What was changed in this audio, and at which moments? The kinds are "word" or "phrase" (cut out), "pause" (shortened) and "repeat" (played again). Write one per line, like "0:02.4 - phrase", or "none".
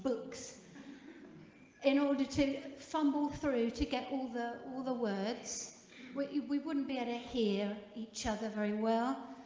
none